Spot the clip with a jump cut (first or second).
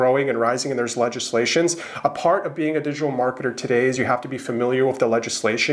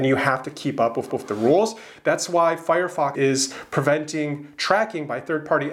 second